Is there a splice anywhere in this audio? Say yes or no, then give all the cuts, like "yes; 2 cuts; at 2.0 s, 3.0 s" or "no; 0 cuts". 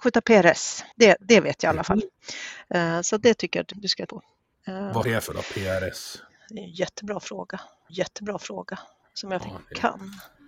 yes; 6 cuts; at 0.9 s, 3.7 s, 4.1 s, 5.0 s, 7.9 s, 9.4 s